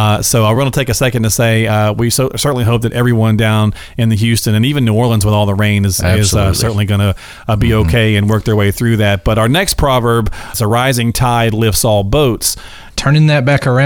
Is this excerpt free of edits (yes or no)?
yes